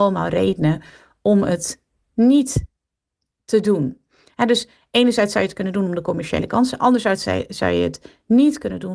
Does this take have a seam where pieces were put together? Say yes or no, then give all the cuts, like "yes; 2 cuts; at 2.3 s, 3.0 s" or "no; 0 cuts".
no; 0 cuts